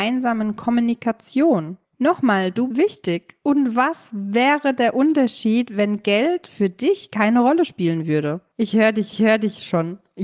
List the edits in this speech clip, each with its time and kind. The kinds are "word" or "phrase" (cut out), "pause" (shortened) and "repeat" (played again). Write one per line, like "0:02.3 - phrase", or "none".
0:02.7 - word
0:09.1 - repeat